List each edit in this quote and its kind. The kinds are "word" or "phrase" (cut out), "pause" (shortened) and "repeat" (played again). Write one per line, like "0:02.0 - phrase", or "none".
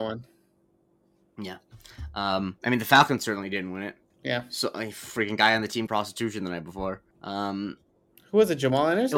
0:02.6 - pause
0:04.1 - pause
0:05.9 - phrase
0:07.1 - pause